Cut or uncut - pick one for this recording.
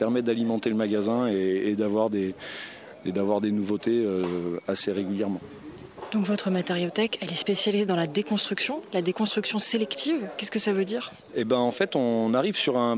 uncut